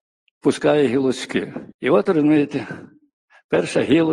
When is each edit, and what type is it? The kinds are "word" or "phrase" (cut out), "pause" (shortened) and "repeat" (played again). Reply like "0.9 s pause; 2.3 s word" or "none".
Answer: 1.7 s pause